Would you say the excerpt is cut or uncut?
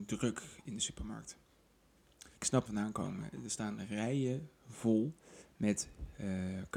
cut